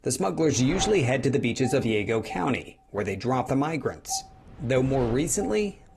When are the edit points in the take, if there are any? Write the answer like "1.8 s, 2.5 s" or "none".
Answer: 1.8 s, 3.5 s